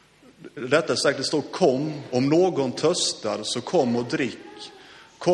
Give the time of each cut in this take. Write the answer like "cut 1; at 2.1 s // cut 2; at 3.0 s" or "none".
none